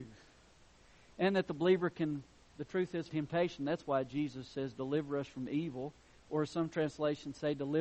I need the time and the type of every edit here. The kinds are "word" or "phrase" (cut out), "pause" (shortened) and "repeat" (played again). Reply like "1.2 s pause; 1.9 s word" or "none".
3.1 s phrase